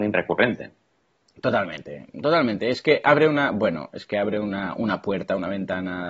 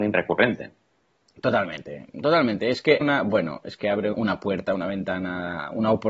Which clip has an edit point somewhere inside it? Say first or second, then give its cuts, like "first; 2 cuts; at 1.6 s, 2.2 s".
second; 2 cuts; at 3.0 s, 4.1 s